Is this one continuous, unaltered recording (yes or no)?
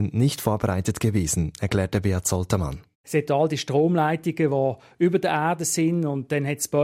yes